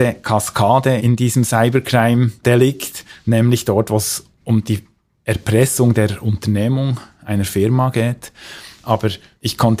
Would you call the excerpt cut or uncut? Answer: uncut